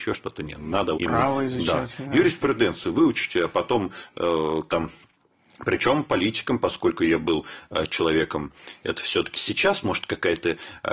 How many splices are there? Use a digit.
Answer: 3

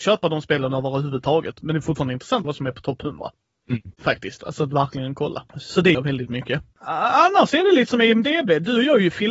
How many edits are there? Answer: 3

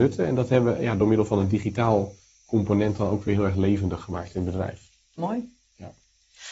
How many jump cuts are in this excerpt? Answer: 0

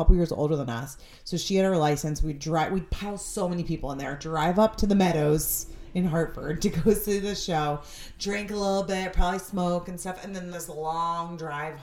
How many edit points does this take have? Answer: 1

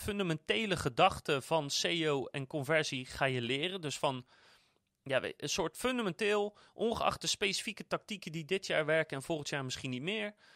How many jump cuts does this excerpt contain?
0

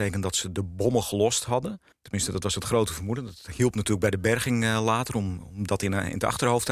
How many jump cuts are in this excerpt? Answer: 1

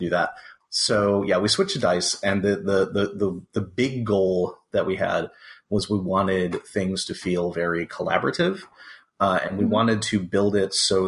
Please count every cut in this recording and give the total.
0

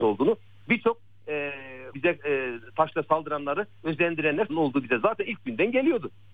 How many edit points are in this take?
2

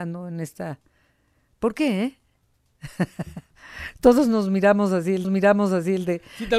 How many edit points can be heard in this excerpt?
1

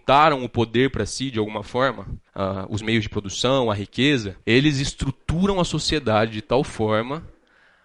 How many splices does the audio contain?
2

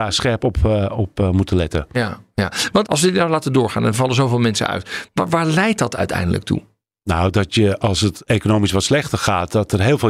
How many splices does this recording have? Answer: 0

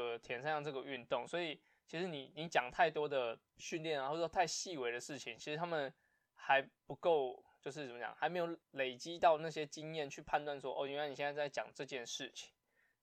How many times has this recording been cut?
2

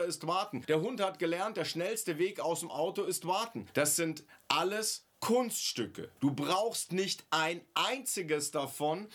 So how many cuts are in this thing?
0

